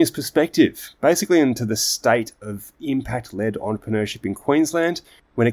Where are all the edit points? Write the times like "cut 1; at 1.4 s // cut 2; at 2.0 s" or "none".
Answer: none